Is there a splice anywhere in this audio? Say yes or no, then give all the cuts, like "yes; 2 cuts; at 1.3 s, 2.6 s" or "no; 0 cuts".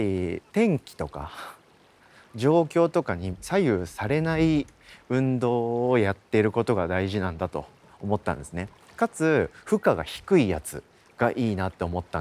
no; 0 cuts